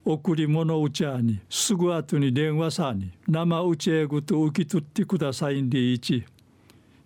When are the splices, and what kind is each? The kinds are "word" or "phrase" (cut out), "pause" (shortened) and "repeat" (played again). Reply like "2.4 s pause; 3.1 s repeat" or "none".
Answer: 1.4 s pause; 3.2 s pause